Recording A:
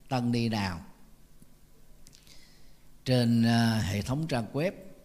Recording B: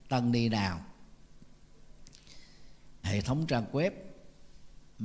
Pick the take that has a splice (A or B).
B